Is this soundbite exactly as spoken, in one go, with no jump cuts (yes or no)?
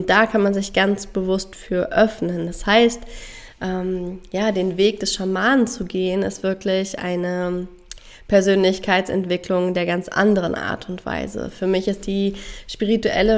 yes